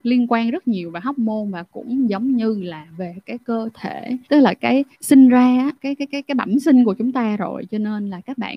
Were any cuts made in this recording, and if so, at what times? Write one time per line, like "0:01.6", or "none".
0:04.2
0:04.9
0:05.8

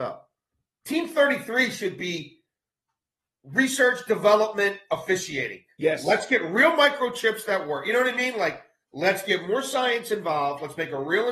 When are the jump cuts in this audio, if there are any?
none

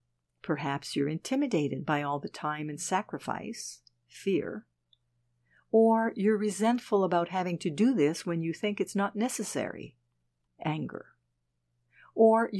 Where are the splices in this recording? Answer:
none

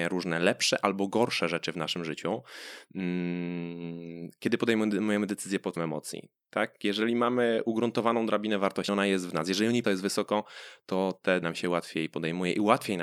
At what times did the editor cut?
0:05.8
0:08.9
0:09.8
0:11.4

